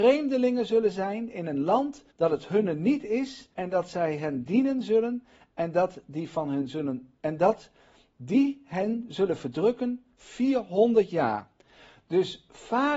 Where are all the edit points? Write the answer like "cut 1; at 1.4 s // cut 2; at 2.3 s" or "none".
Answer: cut 1; at 2.1 s // cut 2; at 3.5 s

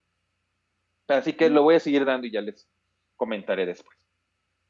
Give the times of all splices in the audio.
none

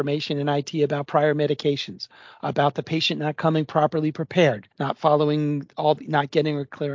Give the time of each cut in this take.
cut 1; at 4.7 s

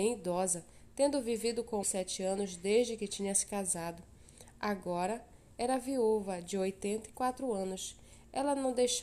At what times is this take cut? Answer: cut 1; at 1.8 s

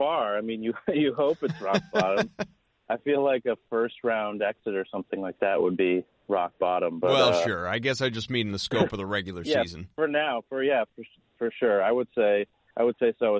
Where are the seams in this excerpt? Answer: none

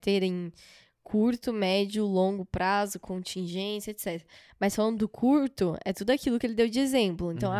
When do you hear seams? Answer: none

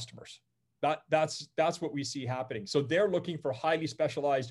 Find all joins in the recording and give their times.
none

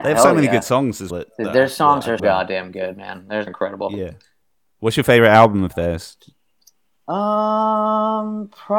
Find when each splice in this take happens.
cut 1; at 1.1 s // cut 2; at 2.2 s // cut 3; at 3.5 s

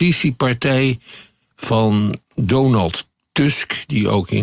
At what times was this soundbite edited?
cut 1; at 2.2 s

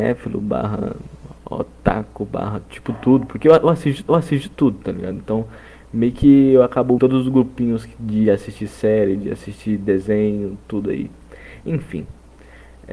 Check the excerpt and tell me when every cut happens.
cut 1; at 4.1 s // cut 2; at 7.0 s

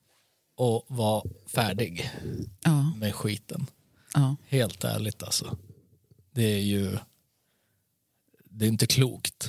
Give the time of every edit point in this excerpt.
cut 1; at 2.5 s

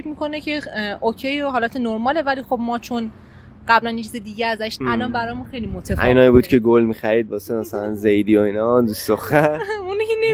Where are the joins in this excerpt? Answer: cut 1; at 4.8 s

